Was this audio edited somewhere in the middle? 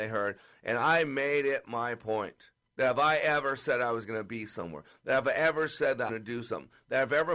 yes; 2 cuts; at 2.7 s, 6.1 s

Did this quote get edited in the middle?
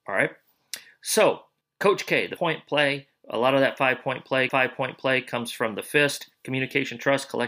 yes; 3 cuts; at 1.6 s, 2.4 s, 4.5 s

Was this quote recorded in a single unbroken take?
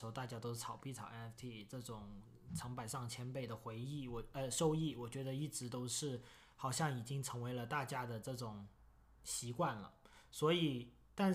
yes; 0 cuts

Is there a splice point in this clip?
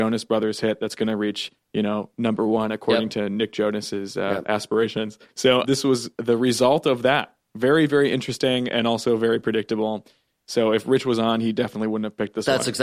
no; 0 cuts

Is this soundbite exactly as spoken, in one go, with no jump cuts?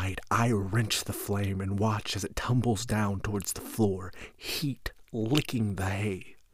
yes; 0 cuts

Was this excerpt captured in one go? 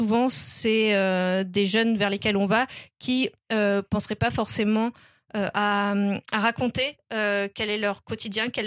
yes; 0 cuts

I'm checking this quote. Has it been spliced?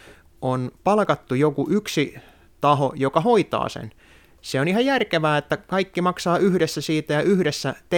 no; 0 cuts

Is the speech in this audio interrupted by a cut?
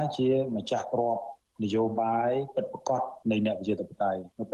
yes; 1 cut; at 3.2 s

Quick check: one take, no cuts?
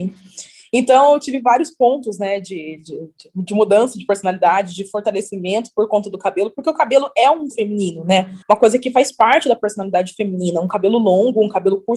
no; 2 cuts; at 7.5 s, 8.4 s

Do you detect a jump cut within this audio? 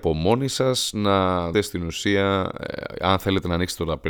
yes; 1 cut; at 1.5 s

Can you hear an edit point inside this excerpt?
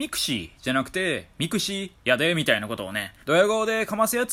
yes; 1 cut; at 3.2 s

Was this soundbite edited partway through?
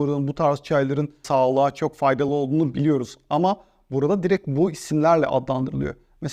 no; 0 cuts

